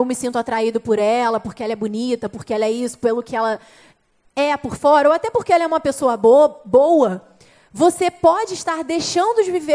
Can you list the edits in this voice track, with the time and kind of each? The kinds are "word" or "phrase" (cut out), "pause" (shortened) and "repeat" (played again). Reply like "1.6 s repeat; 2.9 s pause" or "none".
none